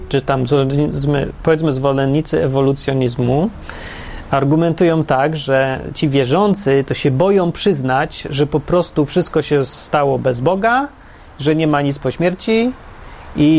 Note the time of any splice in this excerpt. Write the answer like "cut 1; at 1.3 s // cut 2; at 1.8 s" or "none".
none